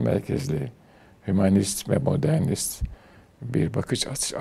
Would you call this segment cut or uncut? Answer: uncut